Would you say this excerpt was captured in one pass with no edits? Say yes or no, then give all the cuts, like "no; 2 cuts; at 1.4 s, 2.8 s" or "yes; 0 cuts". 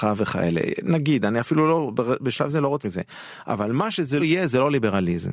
no; 2 cuts; at 2.8 s, 4.2 s